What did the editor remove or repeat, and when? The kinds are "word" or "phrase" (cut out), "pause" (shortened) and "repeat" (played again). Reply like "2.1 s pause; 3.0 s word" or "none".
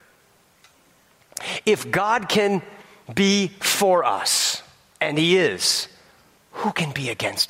none